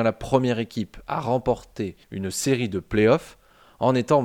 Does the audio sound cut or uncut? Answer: cut